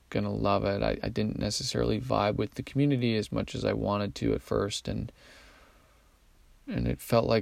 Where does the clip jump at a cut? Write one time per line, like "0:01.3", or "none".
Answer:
none